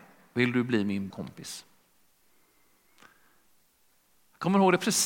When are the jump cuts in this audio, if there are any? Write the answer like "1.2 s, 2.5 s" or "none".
1.1 s